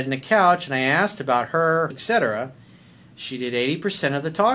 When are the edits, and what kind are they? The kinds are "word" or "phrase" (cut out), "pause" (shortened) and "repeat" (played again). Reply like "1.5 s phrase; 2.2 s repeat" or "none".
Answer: 1.9 s phrase